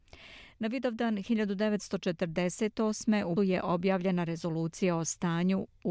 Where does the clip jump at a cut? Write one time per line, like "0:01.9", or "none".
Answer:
0:03.4